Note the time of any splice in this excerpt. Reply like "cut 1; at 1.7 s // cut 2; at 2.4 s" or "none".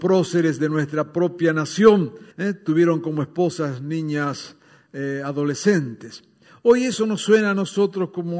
cut 1; at 2.3 s